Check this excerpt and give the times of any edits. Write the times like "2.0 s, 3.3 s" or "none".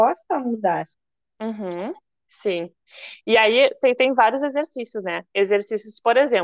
none